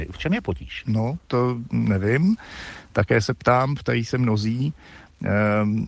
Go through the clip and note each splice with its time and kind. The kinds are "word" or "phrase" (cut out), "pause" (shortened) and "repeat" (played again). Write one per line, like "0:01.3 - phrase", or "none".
none